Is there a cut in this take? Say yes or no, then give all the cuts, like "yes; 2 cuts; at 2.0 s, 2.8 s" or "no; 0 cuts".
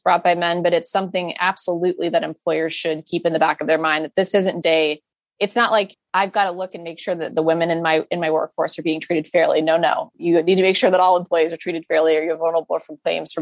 yes; 1 cut; at 4.6 s